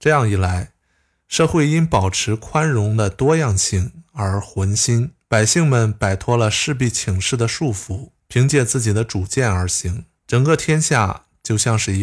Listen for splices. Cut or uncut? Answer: cut